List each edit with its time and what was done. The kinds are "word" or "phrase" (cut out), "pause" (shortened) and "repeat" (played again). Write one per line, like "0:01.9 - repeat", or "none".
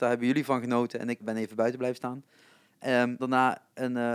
0:01.2 - word
0:03.2 - word